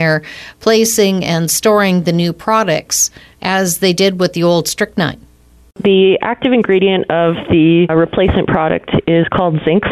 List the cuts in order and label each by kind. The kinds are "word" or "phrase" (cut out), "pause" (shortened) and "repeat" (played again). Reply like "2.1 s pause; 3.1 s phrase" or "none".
7.9 s word